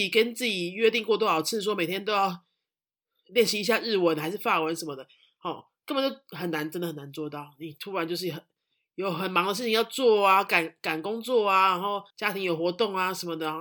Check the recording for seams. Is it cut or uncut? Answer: cut